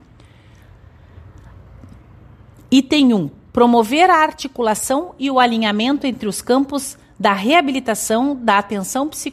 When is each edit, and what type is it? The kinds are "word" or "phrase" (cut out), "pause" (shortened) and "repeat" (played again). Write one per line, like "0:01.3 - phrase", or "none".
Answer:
none